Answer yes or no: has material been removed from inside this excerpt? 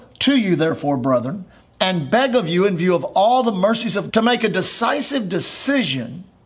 yes